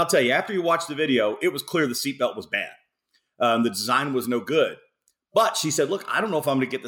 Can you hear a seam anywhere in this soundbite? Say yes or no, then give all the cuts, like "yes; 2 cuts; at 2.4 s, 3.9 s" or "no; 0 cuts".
no; 0 cuts